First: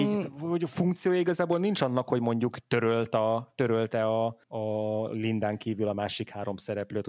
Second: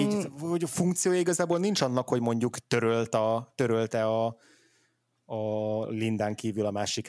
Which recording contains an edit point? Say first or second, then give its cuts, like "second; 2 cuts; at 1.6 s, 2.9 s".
first; 1 cut; at 4.4 s